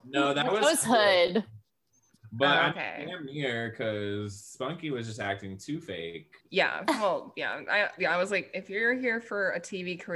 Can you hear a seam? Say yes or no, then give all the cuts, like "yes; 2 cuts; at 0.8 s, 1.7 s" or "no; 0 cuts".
yes; 1 cut; at 6.4 s